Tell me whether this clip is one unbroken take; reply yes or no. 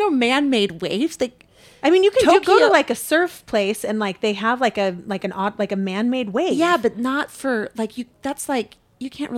yes